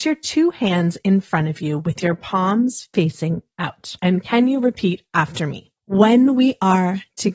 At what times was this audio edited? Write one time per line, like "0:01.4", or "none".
0:04.0
0:05.8